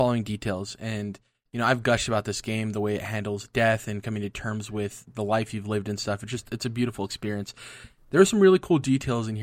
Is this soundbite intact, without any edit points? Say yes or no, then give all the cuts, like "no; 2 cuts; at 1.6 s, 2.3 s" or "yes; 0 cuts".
yes; 0 cuts